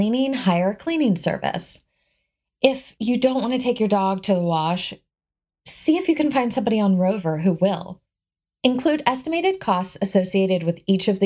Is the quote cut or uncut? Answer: uncut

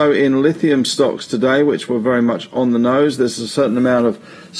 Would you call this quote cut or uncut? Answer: uncut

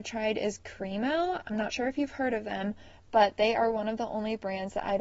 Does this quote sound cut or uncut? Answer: uncut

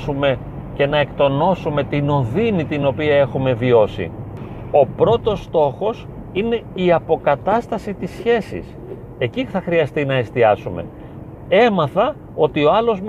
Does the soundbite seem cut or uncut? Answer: uncut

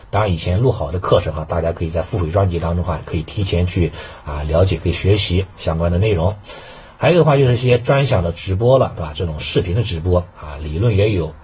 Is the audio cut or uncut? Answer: uncut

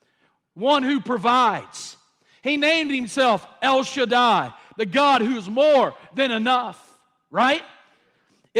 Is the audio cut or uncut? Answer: uncut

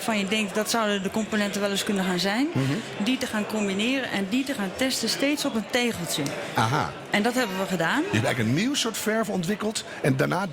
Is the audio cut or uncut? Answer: uncut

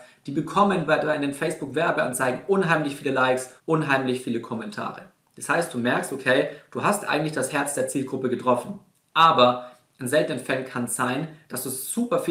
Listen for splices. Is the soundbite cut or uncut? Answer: cut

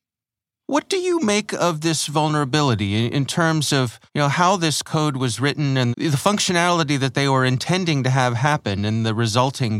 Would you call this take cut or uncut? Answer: cut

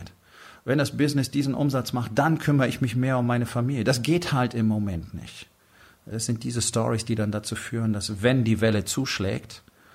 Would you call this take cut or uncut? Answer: uncut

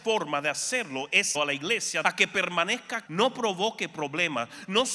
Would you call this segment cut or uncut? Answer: cut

